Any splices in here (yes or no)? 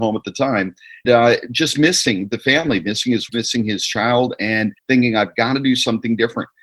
yes